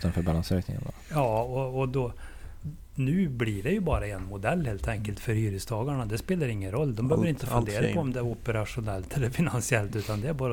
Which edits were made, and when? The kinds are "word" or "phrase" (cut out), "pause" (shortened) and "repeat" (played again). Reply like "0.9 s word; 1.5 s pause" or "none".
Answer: none